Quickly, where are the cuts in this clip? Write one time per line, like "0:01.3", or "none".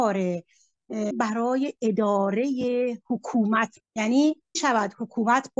0:01.1
0:03.8
0:04.5